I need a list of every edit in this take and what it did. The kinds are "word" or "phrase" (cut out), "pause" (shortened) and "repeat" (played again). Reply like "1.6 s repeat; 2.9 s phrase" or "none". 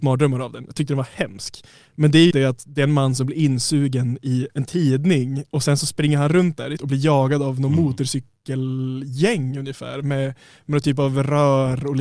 2.3 s word; 4.5 s word; 6.8 s word